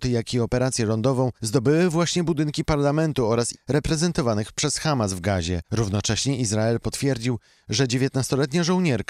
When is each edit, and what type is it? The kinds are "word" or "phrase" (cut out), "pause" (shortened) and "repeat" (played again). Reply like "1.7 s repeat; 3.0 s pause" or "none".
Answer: 1.4 s pause; 3.5 s phrase; 5.6 s pause